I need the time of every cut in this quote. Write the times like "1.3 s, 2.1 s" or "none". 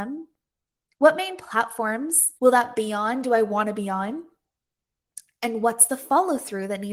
2.4 s